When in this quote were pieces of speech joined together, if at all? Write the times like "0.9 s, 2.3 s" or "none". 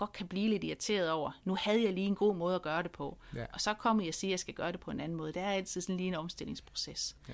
none

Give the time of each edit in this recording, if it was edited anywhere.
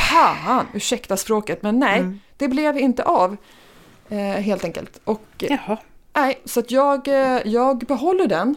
2.3 s

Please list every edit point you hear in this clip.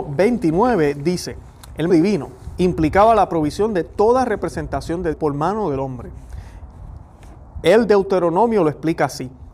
1.9 s, 5.1 s

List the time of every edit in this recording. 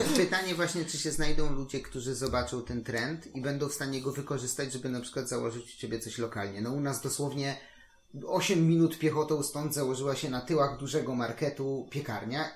none

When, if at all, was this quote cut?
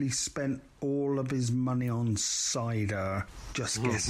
none

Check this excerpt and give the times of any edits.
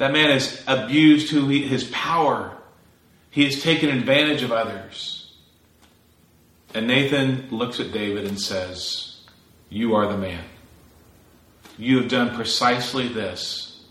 none

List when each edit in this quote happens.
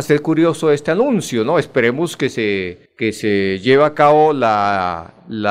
none

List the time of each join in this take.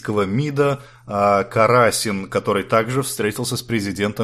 none

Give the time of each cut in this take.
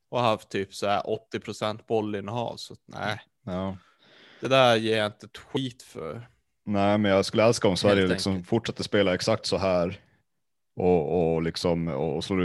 none

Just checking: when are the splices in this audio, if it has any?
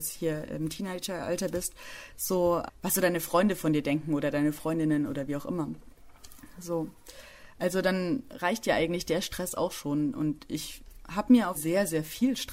2.7 s, 11.5 s

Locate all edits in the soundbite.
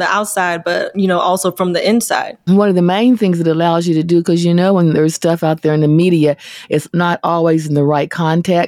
none

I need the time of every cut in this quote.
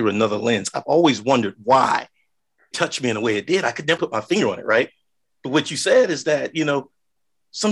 2.7 s, 4.0 s

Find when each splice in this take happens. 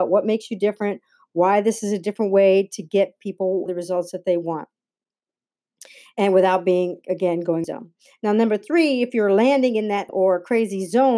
3.7 s, 7.0 s, 7.6 s, 10.1 s

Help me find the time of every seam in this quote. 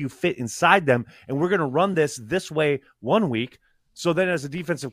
none

